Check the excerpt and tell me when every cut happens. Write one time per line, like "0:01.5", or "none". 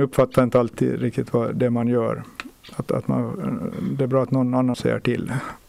0:04.7